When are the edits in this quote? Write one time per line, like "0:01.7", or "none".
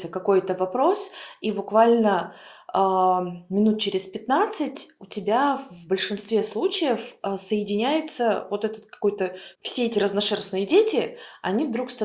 0:09.5